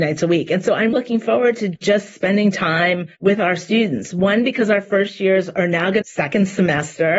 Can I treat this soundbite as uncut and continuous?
no; 3 cuts; at 0.9 s, 3.1 s, 6.0 s

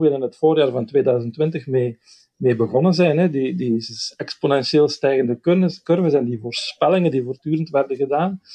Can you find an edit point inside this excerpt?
no; 0 cuts

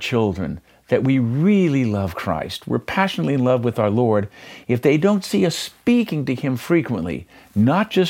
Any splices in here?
no; 0 cuts

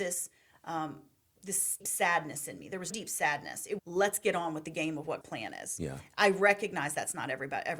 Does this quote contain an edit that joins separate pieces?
yes; 4 cuts; at 1.8 s, 2.9 s, 3.8 s, 5.2 s

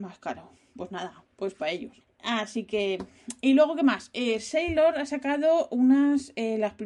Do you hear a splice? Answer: no; 0 cuts

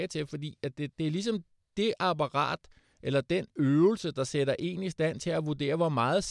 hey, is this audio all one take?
no; 1 cut; at 0.9 s

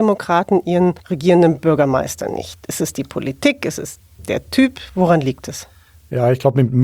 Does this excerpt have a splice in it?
yes; 1 cut; at 1.0 s

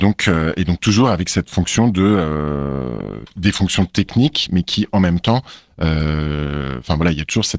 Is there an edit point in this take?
yes; 1 cut; at 3.2 s

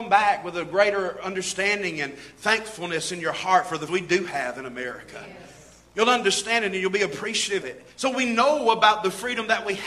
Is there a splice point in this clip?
yes; 3 cuts; at 3.9 s, 7.6 s, 7.9 s

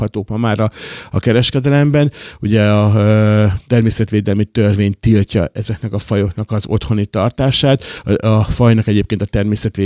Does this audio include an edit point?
no; 0 cuts

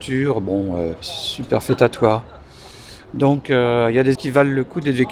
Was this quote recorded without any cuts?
no; 1 cut; at 4.2 s

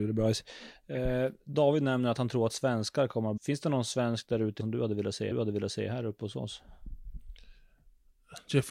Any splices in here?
yes; 4 cuts; at 1.4 s, 3.4 s, 4.6 s, 5.3 s

